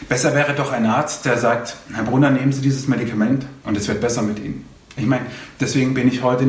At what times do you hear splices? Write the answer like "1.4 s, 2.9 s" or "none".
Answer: 3.6 s